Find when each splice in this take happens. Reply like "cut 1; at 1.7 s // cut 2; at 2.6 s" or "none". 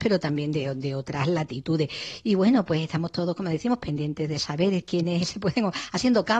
none